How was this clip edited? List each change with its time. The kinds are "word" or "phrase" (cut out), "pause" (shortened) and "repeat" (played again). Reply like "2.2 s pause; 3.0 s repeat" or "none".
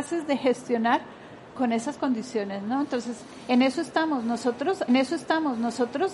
1.5 s word; 4.9 s repeat

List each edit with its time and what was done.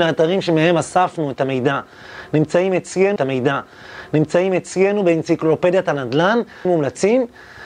3.2 s repeat; 6.6 s word

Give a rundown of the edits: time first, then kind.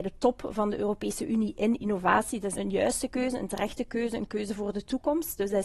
2.6 s word

